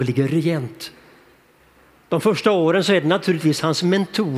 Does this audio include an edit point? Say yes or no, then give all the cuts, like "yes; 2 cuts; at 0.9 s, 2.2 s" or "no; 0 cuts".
no; 0 cuts